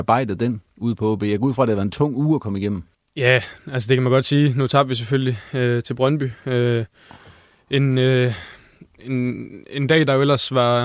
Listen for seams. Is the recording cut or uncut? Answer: cut